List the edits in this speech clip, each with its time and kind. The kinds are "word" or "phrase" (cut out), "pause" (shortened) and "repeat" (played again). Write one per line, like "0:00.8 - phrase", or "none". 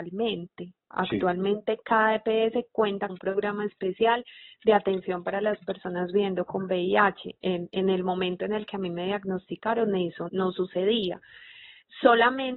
0:03.1 - word
0:07.4 - pause
0:10.3 - word